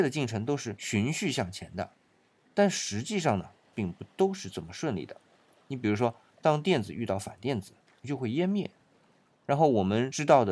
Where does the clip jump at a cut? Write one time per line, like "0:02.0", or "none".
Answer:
none